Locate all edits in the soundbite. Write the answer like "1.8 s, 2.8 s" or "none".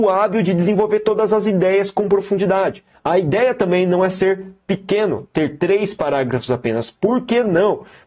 2.9 s